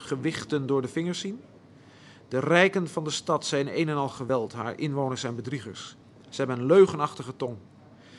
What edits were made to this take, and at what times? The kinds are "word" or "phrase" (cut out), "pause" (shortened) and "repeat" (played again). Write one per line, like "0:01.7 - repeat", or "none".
none